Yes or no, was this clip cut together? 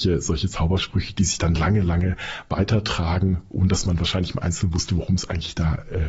no